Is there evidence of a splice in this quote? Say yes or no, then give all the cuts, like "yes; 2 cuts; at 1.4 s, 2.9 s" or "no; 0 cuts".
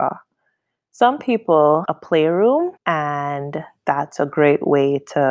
yes; 2 cuts; at 1.8 s, 2.8 s